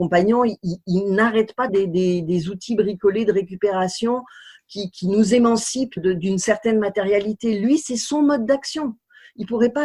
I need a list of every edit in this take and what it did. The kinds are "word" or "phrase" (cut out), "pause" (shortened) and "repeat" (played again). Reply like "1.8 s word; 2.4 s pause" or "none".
1.7 s phrase; 6.0 s word